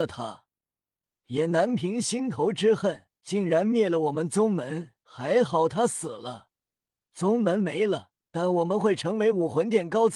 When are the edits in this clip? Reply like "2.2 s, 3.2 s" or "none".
3.2 s, 5.0 s, 8.2 s